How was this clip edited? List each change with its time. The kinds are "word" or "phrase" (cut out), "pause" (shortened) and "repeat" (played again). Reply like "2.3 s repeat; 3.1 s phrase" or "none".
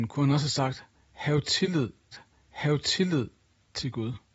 2.1 s repeat

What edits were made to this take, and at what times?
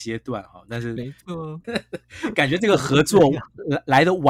1.6 s word

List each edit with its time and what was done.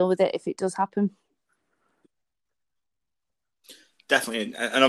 none

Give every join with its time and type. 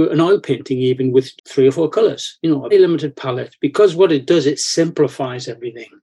1.4 s word; 2.7 s word

